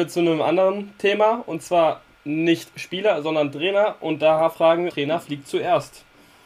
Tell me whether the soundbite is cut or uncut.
cut